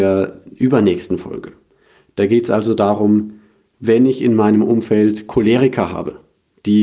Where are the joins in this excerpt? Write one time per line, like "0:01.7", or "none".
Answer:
none